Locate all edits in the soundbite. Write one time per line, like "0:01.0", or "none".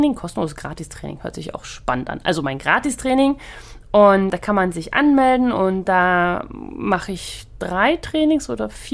none